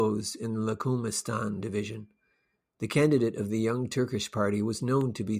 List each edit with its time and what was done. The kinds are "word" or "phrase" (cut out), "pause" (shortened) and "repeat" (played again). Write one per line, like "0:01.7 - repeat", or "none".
none